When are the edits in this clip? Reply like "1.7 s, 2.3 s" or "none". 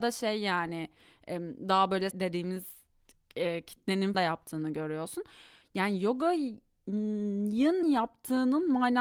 2.1 s, 4.1 s, 7.8 s